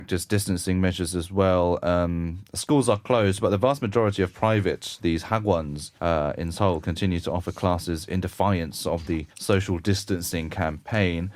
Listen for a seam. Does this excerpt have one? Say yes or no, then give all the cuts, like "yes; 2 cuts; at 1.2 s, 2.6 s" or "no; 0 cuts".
yes; 2 cuts; at 6.0 s, 9.3 s